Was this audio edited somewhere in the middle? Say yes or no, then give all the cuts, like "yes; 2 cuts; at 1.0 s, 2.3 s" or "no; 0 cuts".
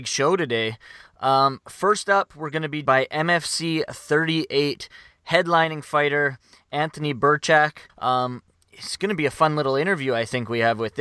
yes; 2 cuts; at 2.9 s, 7.9 s